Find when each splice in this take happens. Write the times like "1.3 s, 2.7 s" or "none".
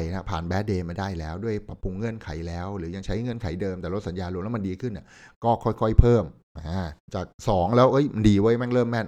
7.0 s

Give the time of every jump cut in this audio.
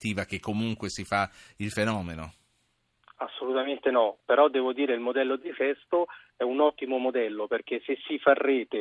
none

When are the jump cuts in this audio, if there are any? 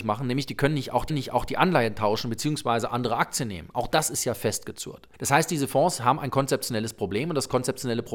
1.1 s, 5.1 s

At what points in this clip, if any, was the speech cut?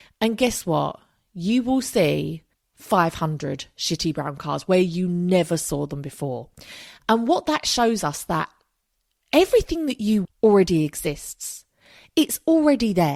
2.5 s, 10.2 s

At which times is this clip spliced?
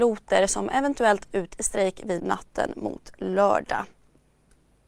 1.3 s, 2.2 s

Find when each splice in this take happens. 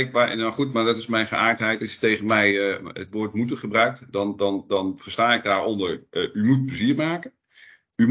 none

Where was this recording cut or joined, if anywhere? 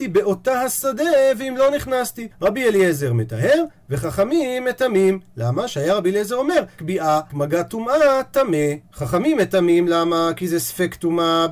2.3 s, 6.8 s, 7.3 s, 8.9 s

